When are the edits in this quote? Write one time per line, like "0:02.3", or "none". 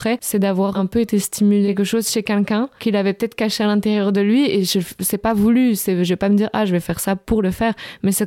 none